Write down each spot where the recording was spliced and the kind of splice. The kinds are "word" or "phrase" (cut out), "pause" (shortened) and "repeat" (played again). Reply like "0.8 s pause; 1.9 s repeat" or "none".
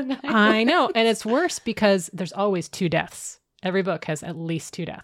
none